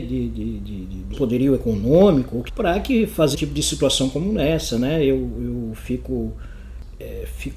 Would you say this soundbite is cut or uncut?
cut